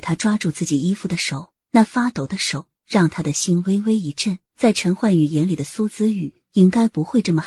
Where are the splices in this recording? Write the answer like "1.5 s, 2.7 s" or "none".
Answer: 1.6 s, 4.5 s